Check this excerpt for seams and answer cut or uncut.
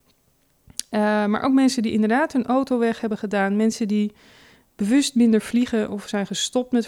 uncut